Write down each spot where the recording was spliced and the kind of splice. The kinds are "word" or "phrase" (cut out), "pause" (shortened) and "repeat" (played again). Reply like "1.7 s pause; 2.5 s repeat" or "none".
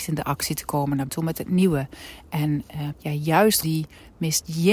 1.1 s word; 2.9 s word; 3.6 s word